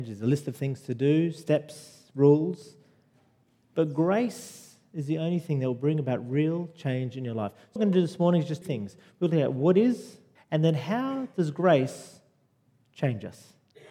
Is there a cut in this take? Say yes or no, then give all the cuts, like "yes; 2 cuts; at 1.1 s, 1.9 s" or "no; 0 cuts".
yes; 3 cuts; at 7.8 s, 8.6 s, 10.4 s